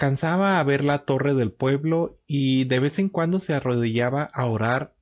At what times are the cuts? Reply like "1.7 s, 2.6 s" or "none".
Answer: none